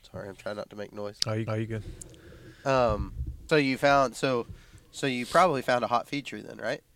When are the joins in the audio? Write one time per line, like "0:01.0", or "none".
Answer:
0:01.5
0:03.5